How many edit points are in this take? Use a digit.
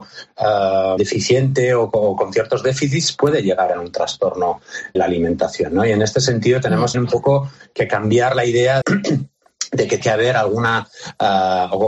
6